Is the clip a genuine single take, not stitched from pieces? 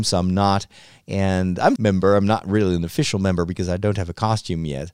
no; 1 cut; at 1.8 s

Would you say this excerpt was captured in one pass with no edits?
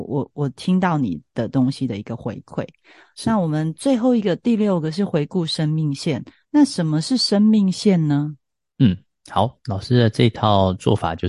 yes; 0 cuts

